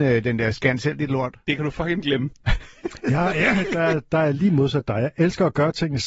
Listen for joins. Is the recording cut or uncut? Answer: uncut